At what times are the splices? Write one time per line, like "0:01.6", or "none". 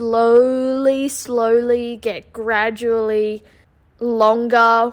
0:03.6